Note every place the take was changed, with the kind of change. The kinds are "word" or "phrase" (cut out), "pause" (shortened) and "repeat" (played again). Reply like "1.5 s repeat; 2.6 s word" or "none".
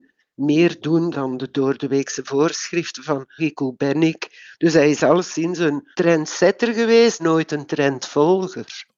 1.1 s word; 3.4 s phrase; 5.9 s pause; 7.2 s word